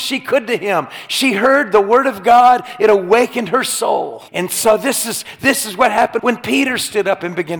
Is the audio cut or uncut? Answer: cut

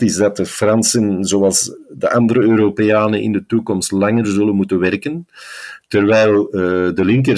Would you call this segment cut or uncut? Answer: uncut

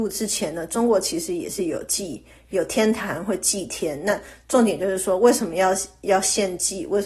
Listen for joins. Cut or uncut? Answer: uncut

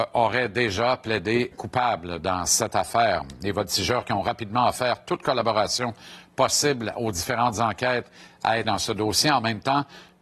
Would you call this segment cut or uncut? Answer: cut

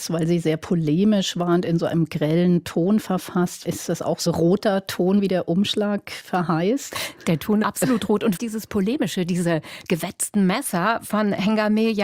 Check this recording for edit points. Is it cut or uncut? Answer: cut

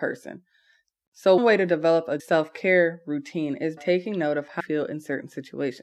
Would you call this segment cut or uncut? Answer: cut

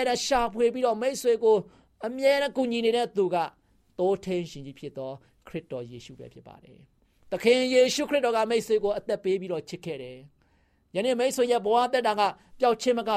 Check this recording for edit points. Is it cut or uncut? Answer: uncut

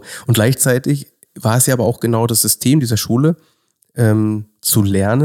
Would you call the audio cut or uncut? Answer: uncut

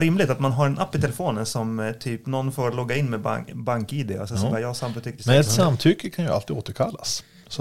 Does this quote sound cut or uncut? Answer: uncut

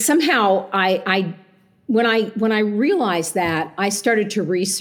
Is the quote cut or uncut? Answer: uncut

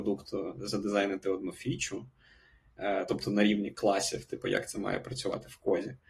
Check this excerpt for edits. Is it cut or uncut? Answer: uncut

